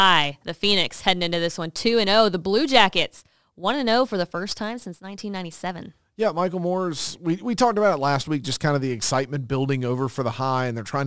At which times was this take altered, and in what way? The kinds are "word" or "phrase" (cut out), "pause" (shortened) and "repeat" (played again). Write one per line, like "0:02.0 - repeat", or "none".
none